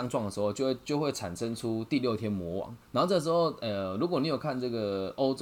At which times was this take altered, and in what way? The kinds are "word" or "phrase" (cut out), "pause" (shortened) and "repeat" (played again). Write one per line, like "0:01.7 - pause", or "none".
0:02.8 - pause